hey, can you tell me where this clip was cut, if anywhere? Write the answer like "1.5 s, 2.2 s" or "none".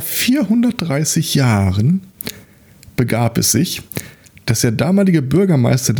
none